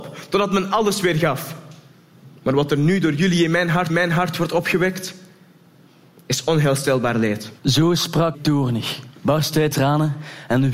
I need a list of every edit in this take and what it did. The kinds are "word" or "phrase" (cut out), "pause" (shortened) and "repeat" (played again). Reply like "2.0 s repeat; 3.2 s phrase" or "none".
2.4 s pause; 3.9 s repeat; 7.6 s pause; 8.3 s word; 9.1 s pause; 9.7 s word